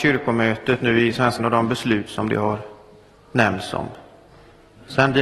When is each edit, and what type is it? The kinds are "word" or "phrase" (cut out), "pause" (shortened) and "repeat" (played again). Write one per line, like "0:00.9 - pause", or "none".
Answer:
0:01.4 - word